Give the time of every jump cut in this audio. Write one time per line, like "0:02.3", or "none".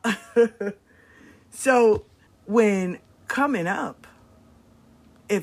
0:02.3

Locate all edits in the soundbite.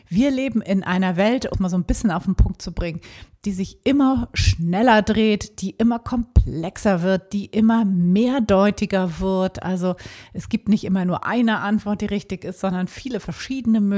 0:01.5

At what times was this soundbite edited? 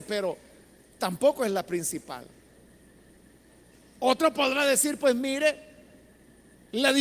none

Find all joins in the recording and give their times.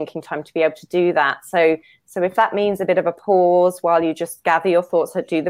none

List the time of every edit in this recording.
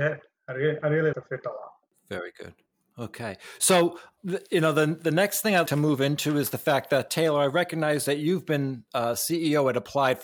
0:01.1
0:01.9
0:02.7
0:04.2
0:05.7
0:07.1

